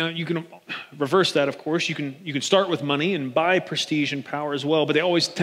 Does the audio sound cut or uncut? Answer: uncut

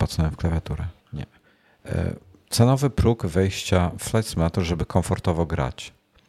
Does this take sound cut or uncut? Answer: cut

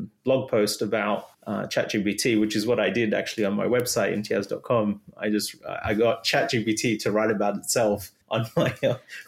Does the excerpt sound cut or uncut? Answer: cut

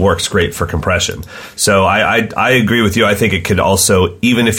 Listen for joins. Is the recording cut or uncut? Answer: uncut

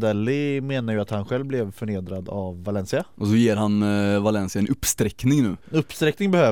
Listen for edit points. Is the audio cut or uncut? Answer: uncut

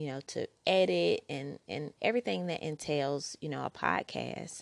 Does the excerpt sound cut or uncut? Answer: uncut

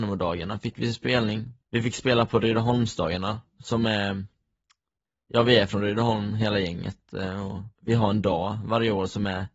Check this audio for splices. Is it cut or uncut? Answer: cut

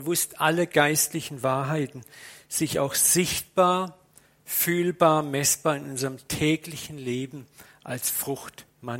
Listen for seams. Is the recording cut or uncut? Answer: uncut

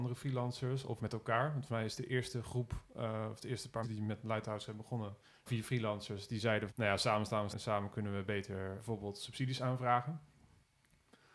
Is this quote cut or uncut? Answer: cut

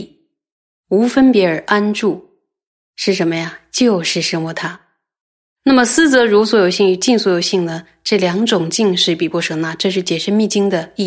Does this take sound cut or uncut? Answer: uncut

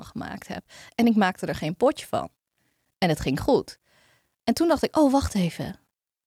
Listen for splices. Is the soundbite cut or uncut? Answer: uncut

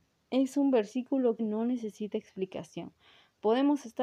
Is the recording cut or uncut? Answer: cut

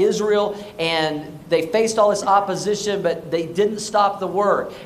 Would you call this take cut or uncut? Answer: uncut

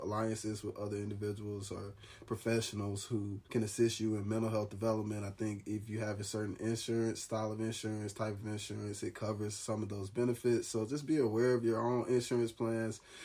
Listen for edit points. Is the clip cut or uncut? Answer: cut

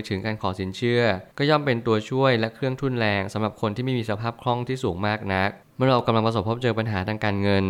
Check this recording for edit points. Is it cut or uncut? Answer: cut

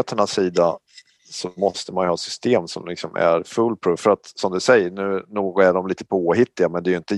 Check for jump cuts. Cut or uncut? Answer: uncut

